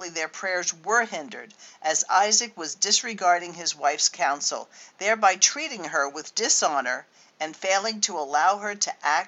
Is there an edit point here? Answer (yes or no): no